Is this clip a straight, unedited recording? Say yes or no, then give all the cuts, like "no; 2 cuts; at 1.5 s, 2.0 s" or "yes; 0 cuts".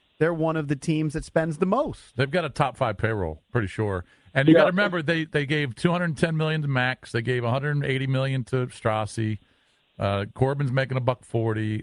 yes; 0 cuts